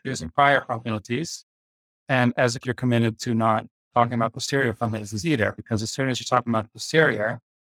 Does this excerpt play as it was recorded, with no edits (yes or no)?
no